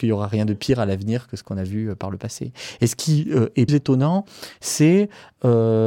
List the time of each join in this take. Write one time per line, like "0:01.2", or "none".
0:03.7